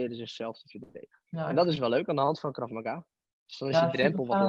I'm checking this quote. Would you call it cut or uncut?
cut